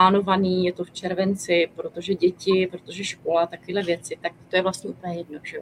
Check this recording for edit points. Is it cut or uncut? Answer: uncut